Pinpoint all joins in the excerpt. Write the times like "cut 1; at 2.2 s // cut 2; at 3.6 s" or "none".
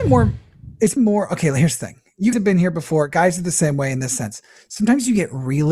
cut 1; at 1.0 s // cut 2; at 2.3 s